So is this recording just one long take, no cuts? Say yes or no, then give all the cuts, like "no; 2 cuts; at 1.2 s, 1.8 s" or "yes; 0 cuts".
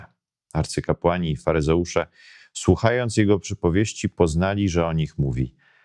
yes; 0 cuts